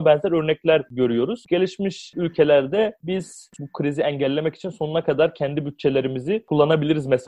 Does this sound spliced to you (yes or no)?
no